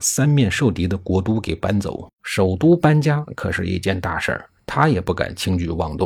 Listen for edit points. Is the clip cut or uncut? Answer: cut